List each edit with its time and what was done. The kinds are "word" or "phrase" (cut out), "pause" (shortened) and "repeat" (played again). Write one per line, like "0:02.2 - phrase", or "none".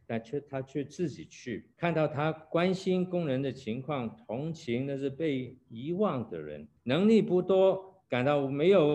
0:01.7 - pause
0:06.8 - pause